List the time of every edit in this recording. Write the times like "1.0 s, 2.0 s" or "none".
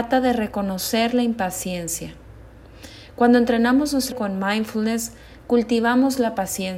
4.1 s